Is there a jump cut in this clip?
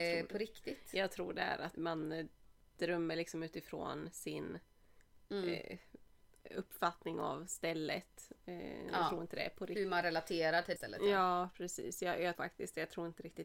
yes; 3 cuts; at 1.8 s, 10.8 s, 12.3 s

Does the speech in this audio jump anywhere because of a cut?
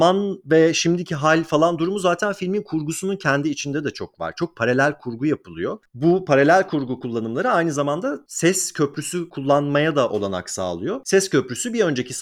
no; 0 cuts

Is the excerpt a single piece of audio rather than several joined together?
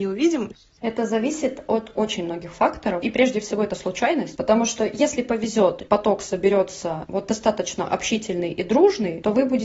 yes; 0 cuts

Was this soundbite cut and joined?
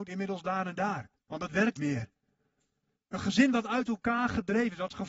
yes; 2 cuts; at 1.1 s, 1.8 s

